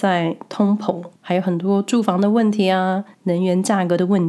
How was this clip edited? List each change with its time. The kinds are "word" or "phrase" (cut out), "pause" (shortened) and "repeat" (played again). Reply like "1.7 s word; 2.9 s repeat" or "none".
1.2 s pause; 3.1 s pause